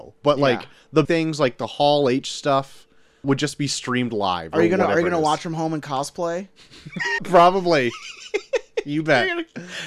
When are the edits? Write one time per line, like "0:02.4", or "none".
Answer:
0:01.0
0:03.2
0:07.2